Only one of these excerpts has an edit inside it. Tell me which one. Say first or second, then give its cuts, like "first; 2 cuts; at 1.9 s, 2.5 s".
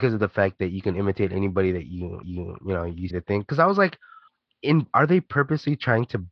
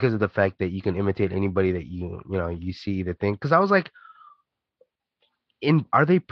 first; 3 cuts; at 2.2 s, 3.1 s, 4.3 s